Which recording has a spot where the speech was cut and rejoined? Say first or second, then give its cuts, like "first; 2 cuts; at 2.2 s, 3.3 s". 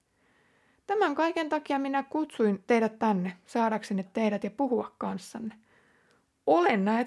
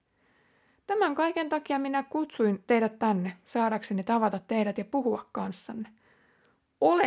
first; 1 cut; at 4.0 s